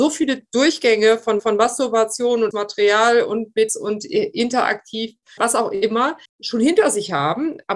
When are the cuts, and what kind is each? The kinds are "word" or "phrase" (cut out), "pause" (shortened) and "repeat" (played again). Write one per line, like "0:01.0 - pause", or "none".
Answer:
0:01.4 - repeat
0:02.5 - word
0:03.7 - word
0:05.4 - word
0:06.2 - pause